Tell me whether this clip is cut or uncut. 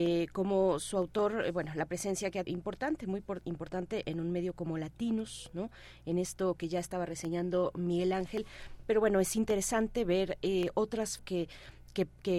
cut